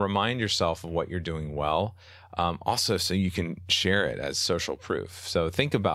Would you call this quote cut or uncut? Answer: uncut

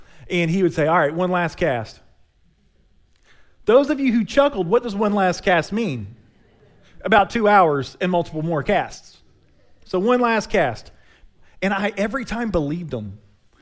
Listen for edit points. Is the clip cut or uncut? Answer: uncut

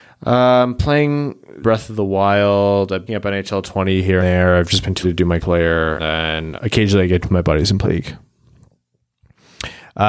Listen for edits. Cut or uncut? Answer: cut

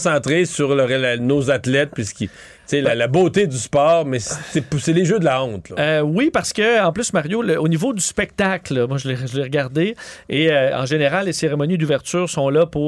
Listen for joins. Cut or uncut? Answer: uncut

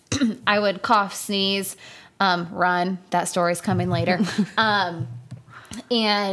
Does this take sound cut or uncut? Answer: uncut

